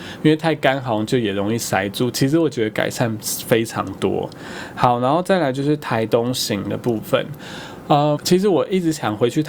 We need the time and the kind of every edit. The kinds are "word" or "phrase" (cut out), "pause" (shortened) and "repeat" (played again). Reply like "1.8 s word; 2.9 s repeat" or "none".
8.2 s word